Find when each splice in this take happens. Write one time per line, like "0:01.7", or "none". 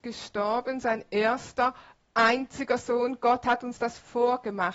none